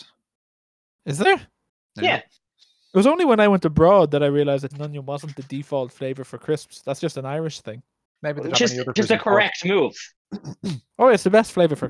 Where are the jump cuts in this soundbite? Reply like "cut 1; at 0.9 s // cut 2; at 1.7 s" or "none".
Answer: cut 1; at 4.7 s // cut 2; at 8.5 s // cut 3; at 9.0 s